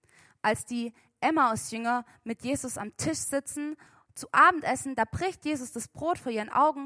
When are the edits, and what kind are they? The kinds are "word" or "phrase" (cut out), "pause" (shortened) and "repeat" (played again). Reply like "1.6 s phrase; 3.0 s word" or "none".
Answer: none